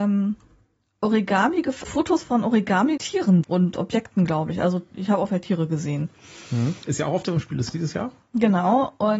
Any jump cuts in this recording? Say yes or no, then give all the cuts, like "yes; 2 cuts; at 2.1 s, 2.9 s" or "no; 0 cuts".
yes; 6 cuts; at 1.8 s, 3.0 s, 3.4 s, 5.3 s, 7.2 s, 7.7 s